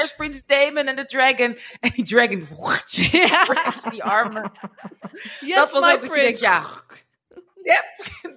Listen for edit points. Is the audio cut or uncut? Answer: uncut